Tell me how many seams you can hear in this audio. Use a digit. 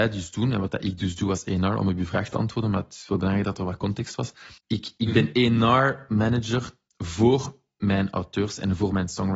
1